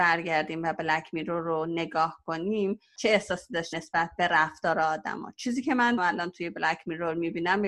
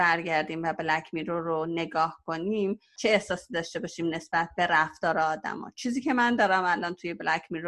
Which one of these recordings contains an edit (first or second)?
first